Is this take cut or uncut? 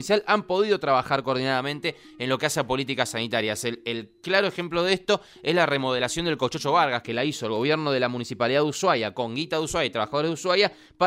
uncut